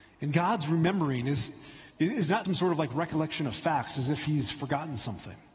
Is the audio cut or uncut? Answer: cut